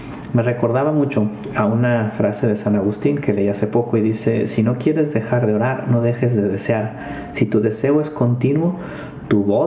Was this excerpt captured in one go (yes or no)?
yes